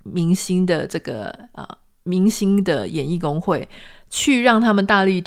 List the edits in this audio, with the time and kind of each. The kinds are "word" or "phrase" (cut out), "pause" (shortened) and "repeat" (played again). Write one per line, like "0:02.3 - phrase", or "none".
none